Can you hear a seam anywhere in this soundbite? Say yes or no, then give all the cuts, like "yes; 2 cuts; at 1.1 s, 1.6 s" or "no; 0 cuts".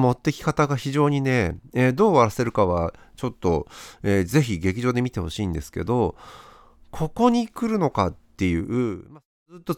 no; 0 cuts